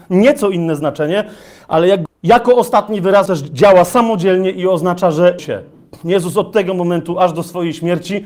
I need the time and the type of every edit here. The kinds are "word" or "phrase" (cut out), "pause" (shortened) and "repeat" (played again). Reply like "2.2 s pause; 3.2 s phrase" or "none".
2.1 s word; 3.3 s word; 5.4 s word